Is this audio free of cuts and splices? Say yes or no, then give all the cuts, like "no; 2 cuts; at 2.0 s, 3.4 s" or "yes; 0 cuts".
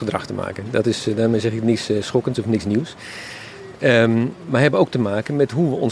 yes; 0 cuts